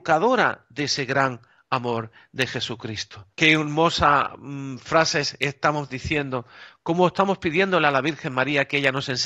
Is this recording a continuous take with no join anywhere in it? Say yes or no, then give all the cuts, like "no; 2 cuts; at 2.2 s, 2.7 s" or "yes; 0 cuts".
no; 1 cut; at 3.3 s